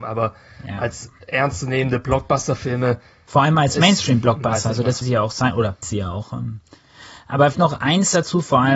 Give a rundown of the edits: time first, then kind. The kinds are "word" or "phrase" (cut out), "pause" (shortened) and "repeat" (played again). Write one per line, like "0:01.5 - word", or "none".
0:05.0 - word
0:05.8 - word
0:07.5 - word

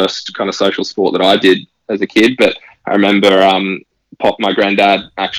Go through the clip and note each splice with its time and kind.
none

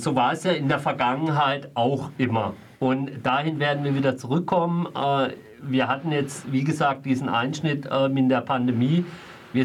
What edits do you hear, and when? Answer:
none

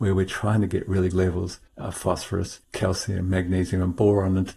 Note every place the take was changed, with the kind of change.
0:01.1 - word
0:01.7 - pause
0:02.6 - pause

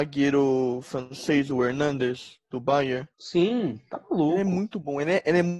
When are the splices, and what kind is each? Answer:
0:03.1 - pause

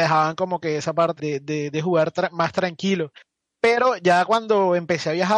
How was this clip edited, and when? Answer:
0:01.2 - word

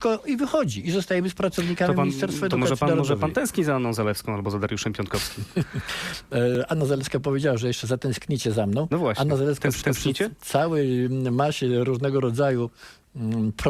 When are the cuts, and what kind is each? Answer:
0:09.8 - repeat

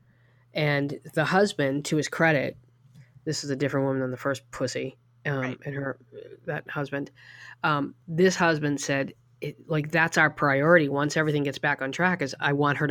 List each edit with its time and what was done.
none

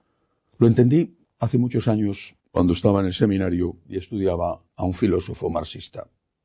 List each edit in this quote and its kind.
0:01.2 - pause
0:02.4 - pause
0:04.7 - pause

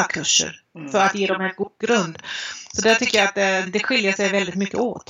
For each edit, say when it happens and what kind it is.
0:03.7 - word

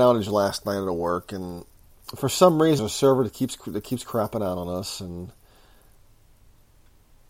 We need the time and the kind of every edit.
0:02.8 - word

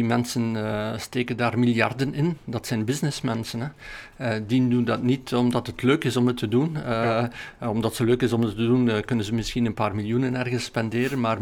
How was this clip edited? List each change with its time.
none

